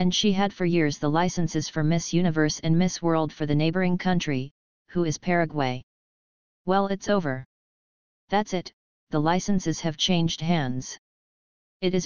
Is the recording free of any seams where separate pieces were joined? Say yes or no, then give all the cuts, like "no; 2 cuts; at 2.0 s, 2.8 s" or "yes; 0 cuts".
yes; 0 cuts